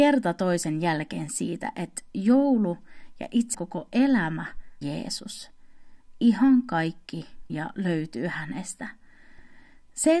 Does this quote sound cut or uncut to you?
cut